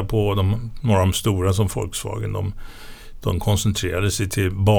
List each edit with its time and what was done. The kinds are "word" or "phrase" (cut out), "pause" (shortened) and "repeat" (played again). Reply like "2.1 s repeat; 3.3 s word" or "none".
none